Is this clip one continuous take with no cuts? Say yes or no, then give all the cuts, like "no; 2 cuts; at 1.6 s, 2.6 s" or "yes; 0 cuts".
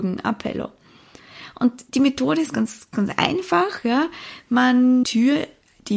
no; 3 cuts; at 1.9 s, 2.9 s, 5.0 s